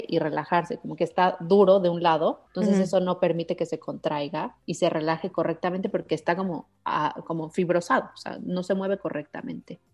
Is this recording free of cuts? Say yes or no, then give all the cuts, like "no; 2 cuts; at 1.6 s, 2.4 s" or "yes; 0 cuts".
no; 1 cut; at 2.5 s